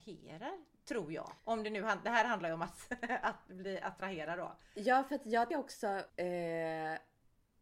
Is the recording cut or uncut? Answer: cut